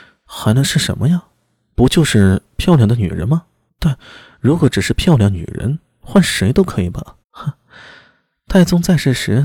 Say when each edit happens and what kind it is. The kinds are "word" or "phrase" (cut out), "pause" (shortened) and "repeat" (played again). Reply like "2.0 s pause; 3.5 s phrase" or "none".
3.7 s pause; 7.2 s pause